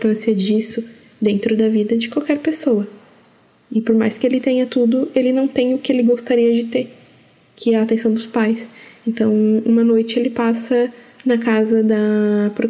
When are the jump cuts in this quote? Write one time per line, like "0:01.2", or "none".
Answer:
none